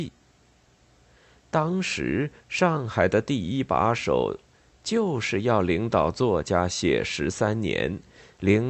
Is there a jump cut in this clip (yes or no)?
no